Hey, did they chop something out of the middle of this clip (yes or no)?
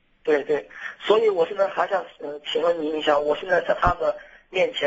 no